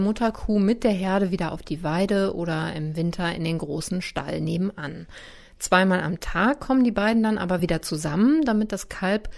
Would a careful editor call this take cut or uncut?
uncut